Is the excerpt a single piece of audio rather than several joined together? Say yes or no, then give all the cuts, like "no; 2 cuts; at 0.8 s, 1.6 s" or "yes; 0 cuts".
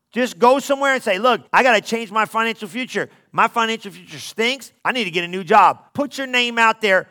no; 3 cuts; at 1.5 s, 4.8 s, 5.9 s